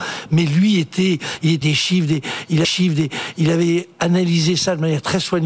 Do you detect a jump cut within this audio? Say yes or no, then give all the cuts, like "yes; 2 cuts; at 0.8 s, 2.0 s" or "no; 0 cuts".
yes; 2 cuts; at 1.6 s, 2.6 s